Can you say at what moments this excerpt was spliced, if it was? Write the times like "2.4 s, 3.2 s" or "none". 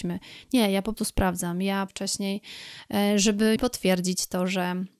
0.9 s, 1.9 s, 3.6 s